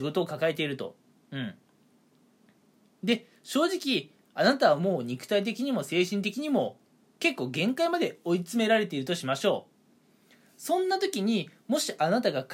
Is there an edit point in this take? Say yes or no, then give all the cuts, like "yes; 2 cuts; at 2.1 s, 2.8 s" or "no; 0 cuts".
no; 0 cuts